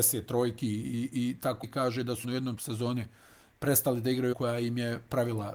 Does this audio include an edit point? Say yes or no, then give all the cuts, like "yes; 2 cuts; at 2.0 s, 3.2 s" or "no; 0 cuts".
yes; 4 cuts; at 1.6 s, 2.2 s, 2.6 s, 4.3 s